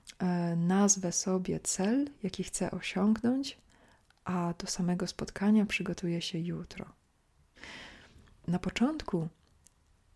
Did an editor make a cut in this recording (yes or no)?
no